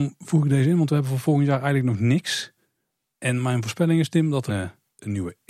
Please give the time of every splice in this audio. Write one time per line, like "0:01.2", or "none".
0:04.5